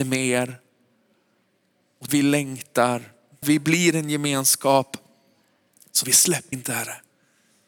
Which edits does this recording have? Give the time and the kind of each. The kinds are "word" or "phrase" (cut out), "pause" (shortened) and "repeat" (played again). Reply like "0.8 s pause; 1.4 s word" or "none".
2.1 s word; 3.4 s word; 6.0 s word; 6.5 s word